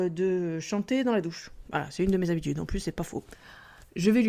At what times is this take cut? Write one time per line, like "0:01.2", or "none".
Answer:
none